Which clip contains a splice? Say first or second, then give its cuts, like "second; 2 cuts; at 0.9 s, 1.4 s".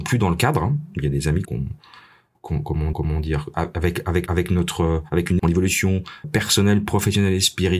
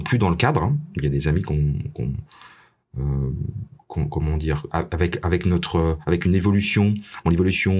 first; 6 cuts; at 1.4 s, 2.3 s, 2.9 s, 4.3 s, 5.4 s, 6.2 s